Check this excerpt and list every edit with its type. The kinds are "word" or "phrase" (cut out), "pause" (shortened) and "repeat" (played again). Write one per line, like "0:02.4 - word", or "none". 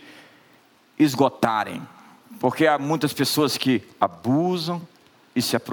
none